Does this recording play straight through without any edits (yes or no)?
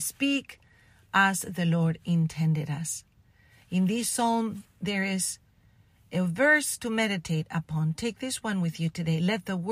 yes